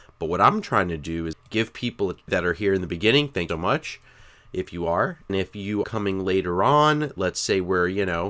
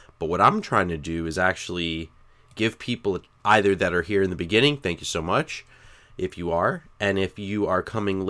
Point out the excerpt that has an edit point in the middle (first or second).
first